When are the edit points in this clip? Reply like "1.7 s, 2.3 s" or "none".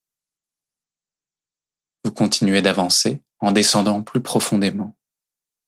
3.3 s